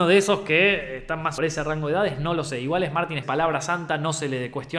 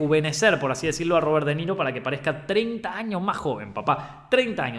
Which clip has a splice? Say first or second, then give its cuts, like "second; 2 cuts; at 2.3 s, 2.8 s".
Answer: first; 2 cuts; at 1.4 s, 3.2 s